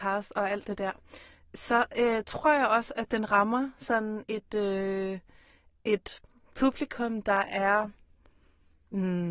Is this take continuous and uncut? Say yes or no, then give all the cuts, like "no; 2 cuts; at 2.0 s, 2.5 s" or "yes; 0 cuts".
yes; 0 cuts